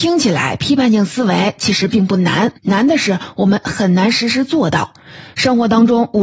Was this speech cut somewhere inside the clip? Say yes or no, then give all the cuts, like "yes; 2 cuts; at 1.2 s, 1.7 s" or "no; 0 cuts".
yes; 1 cut; at 2.6 s